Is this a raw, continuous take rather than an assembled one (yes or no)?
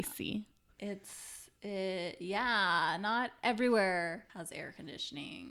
no